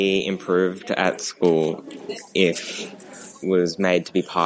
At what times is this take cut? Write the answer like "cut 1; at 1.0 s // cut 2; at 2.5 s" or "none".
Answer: cut 1; at 3.4 s